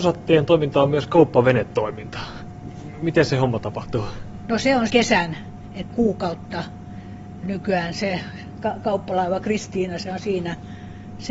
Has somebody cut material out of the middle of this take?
yes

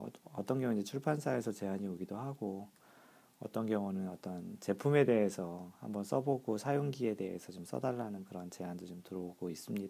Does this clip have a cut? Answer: no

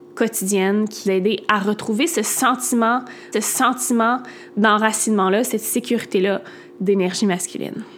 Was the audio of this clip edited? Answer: yes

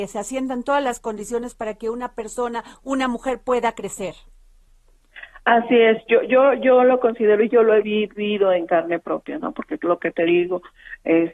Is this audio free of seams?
yes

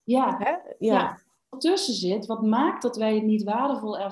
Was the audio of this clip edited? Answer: yes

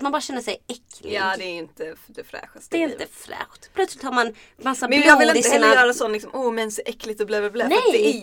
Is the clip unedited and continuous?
yes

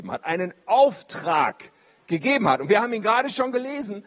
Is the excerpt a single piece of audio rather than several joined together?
yes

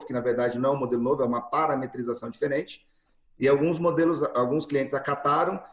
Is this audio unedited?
yes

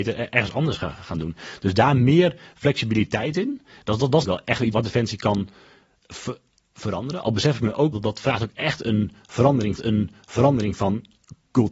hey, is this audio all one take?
no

